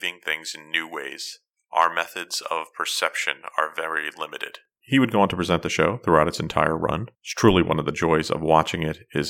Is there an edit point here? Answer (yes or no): yes